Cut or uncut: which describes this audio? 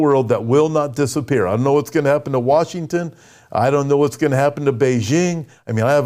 uncut